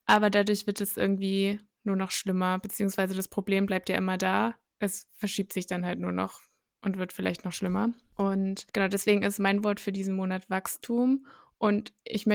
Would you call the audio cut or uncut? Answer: uncut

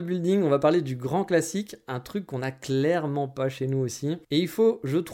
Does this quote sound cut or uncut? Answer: cut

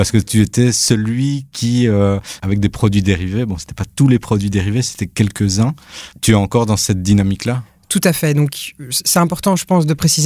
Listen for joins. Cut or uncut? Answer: cut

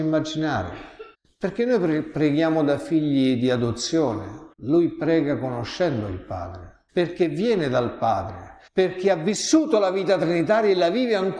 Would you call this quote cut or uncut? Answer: cut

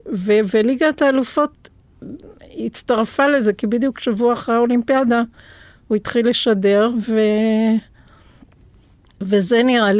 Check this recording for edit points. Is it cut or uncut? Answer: uncut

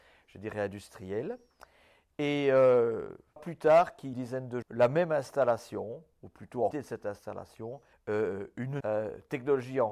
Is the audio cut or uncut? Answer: cut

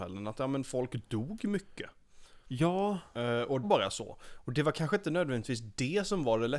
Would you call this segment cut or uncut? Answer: cut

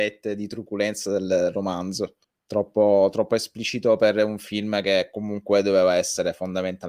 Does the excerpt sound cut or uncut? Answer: cut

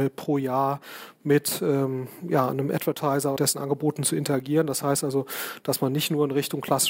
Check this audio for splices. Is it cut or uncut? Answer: cut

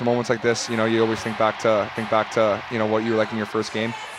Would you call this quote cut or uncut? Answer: cut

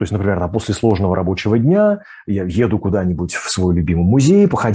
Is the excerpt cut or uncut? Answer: uncut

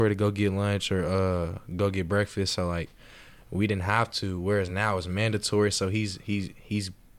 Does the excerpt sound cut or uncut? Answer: uncut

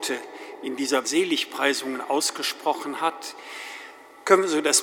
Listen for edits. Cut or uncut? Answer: cut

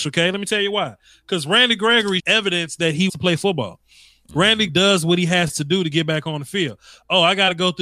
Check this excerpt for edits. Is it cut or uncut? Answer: cut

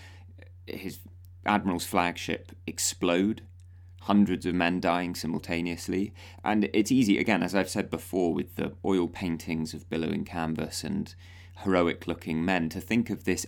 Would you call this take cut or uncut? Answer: uncut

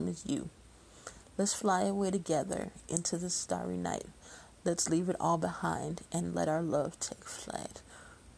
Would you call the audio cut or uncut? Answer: uncut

